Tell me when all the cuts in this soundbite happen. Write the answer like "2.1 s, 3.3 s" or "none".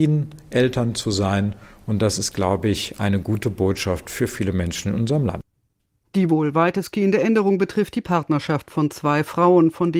none